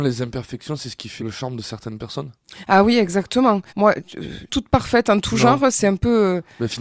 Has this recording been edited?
yes; 3 cuts; at 1.2 s, 3.7 s, 4.5 s

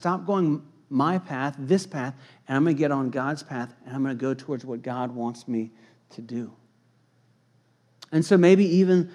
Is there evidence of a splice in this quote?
no; 0 cuts

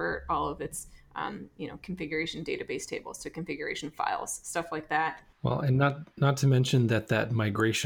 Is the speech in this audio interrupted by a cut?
no; 0 cuts

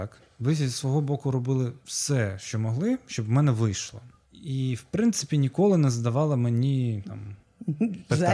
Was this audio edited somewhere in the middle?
no; 0 cuts

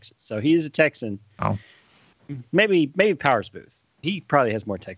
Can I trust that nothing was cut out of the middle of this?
no; 2 cuts; at 2.5 s, 3.9 s

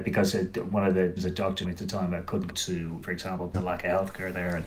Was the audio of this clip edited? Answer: yes; 5 cuts; at 1.2 s, 1.6 s, 2.5 s, 3.0 s, 3.5 s

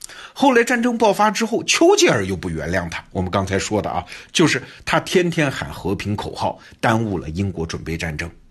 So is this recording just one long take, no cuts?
yes; 0 cuts

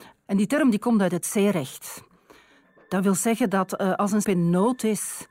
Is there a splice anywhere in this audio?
yes; 1 cut; at 4.2 s

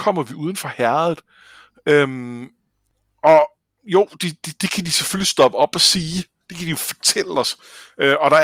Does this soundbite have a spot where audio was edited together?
no; 0 cuts

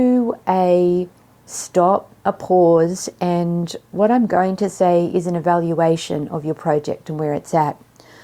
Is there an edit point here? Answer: yes; 1 cut; at 1.2 s

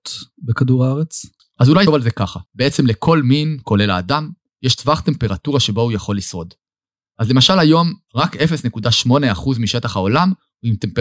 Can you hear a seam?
yes; 3 cuts; at 1.4 s, 1.9 s, 2.5 s

